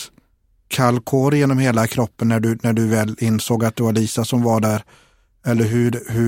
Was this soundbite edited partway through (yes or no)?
no